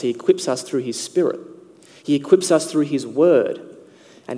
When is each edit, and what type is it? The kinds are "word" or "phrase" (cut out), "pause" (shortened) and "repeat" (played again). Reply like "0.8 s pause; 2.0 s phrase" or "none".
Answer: none